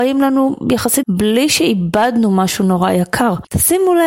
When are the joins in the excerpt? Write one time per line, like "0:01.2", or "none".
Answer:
0:01.0

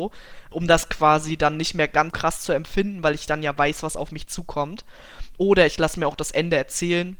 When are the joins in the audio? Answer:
0:02.1

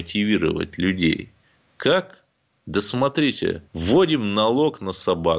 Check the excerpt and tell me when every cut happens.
0:03.7

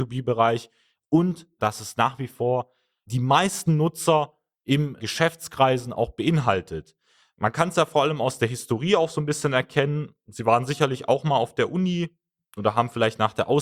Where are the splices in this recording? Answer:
none

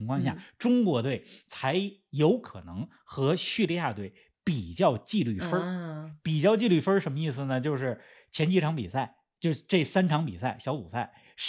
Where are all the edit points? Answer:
none

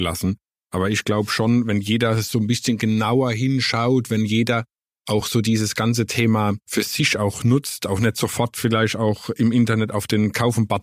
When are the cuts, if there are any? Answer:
none

